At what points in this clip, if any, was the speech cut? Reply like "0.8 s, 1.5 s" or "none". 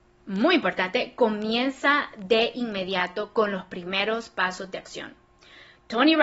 none